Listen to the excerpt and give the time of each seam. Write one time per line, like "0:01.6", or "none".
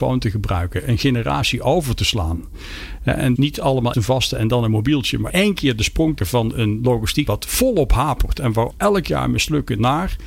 0:03.4
0:03.9
0:05.3
0:06.2
0:07.3
0:08.7